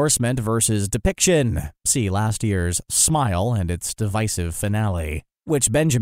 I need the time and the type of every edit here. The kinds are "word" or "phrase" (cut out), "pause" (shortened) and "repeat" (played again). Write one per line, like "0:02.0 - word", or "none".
none